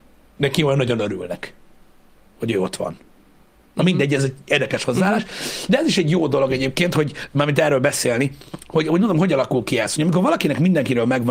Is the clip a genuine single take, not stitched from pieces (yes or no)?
yes